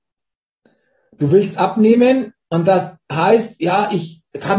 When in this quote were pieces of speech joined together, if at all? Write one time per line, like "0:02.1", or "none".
none